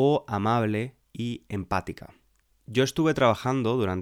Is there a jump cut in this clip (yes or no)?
no